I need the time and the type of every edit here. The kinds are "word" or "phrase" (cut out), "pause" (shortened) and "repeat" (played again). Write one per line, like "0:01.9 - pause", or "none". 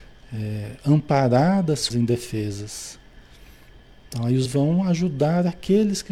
0:01.9 - word
0:04.4 - word